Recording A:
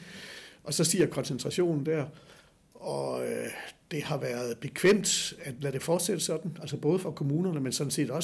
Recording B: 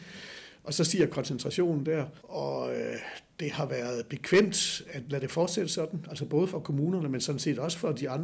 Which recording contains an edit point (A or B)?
B